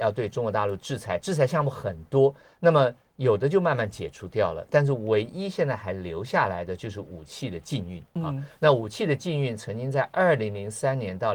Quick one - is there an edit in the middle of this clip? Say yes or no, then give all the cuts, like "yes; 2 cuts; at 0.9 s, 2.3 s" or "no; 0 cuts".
no; 0 cuts